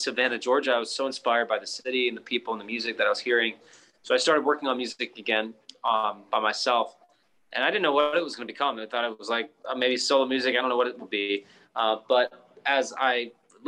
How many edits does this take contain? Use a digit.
0